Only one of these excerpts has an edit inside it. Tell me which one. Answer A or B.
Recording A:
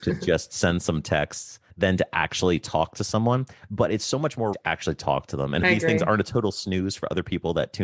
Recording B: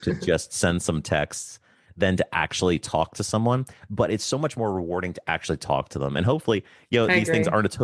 A